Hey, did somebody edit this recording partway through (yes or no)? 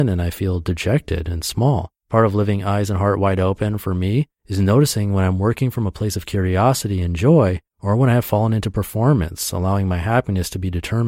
yes